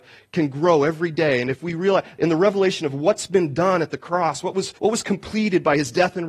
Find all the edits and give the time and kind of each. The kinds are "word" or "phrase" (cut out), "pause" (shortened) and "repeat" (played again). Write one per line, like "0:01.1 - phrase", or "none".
0:04.8 - pause